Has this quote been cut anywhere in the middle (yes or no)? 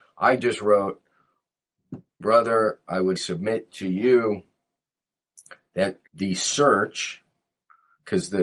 yes